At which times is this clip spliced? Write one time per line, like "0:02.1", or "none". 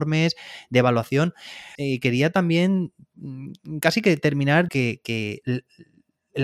0:01.7
0:04.7

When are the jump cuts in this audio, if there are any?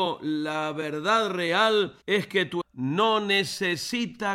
0:02.0
0:02.6

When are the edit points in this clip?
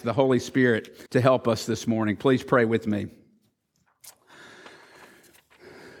0:01.1

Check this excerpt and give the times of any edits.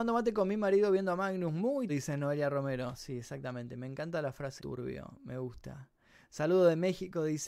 0:01.9
0:04.6

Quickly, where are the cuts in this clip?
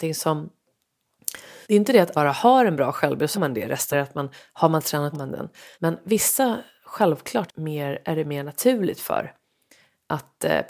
0:01.6
0:02.1
0:03.3
0:03.9
0:05.1
0:05.7
0:07.5

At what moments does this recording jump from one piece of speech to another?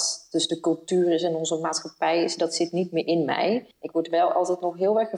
0:03.7

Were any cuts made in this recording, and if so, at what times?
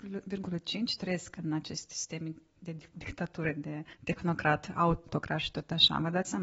0:03.9

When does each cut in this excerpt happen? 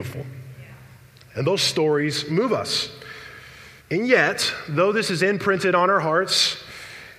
0:03.8

